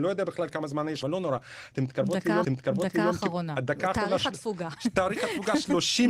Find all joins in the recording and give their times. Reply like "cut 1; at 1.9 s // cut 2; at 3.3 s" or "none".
cut 1; at 1.0 s // cut 2; at 2.4 s